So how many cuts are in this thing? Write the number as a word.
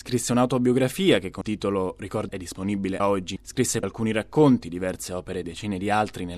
six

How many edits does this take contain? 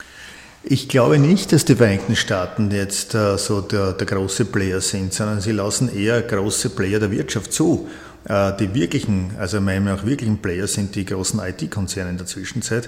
zero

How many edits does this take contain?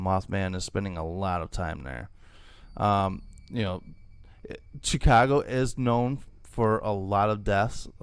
zero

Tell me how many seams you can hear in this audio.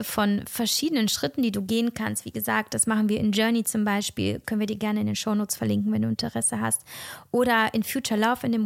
zero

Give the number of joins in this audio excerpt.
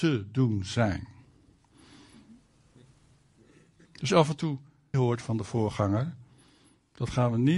two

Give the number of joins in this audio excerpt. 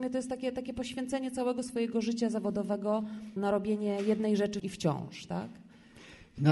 two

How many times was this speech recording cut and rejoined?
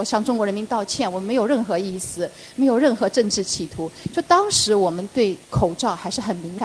one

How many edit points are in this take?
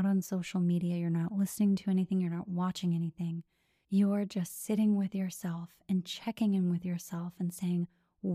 zero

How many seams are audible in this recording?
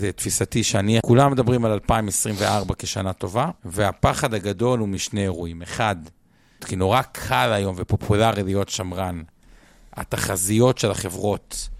three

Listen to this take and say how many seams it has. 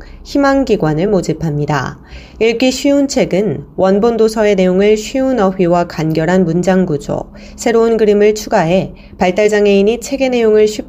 zero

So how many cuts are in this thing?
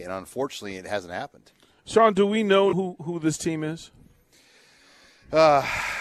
one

